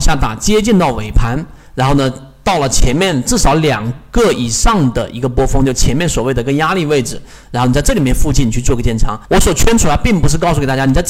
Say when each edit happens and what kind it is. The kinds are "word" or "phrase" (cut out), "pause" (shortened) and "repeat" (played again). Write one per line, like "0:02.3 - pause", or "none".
0:09.2 - pause

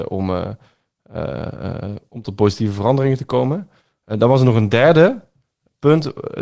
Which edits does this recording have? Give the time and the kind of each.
none

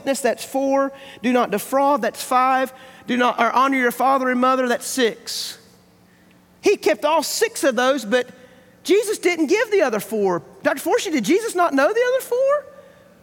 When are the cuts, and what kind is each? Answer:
none

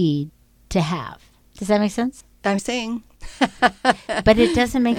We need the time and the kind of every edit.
0:02.6 - phrase

